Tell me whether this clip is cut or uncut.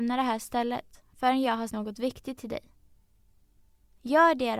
cut